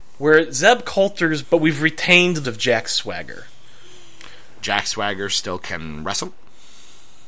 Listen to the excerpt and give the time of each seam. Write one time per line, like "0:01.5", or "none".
0:01.4
0:02.4